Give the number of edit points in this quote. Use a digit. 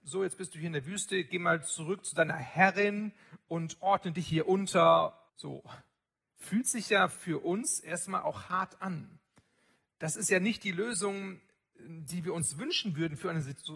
1